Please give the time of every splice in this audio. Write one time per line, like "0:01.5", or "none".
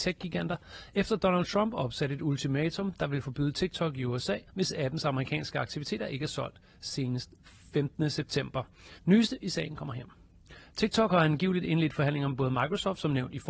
0:04.5
0:09.0